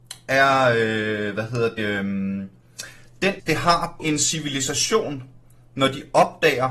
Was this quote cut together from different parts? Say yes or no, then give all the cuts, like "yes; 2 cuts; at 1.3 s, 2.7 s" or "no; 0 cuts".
yes; 3 cuts; at 1.8 s, 3.4 s, 4.0 s